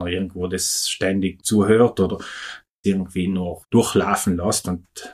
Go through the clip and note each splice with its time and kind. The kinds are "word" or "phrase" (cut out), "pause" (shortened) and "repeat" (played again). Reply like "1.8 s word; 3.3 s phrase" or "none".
1.4 s word; 2.8 s word; 3.6 s word